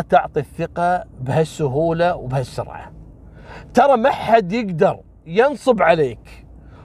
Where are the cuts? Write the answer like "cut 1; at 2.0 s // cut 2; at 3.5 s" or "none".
cut 1; at 1.1 s